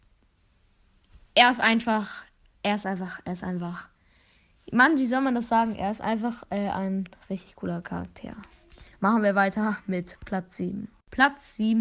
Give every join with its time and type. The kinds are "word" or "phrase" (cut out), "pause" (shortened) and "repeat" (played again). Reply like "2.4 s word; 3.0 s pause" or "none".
none